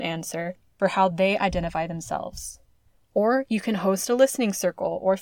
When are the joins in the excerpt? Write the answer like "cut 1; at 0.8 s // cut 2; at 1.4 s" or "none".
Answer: none